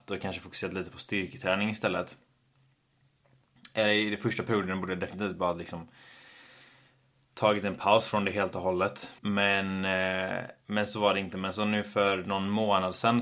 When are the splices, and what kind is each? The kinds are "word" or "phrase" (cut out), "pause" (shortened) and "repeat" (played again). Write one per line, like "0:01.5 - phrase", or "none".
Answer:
0:09.2 - pause

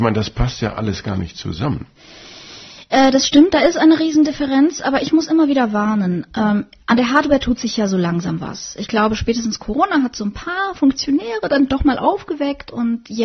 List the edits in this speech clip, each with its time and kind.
none

